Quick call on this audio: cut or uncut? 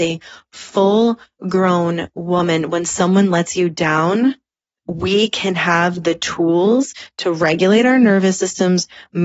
cut